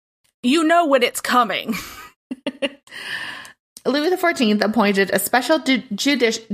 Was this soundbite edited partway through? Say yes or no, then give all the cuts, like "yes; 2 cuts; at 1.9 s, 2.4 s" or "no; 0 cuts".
no; 0 cuts